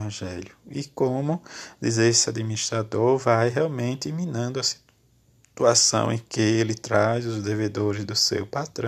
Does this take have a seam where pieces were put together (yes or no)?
no